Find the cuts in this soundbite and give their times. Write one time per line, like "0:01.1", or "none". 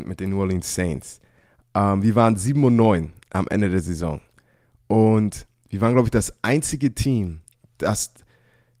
none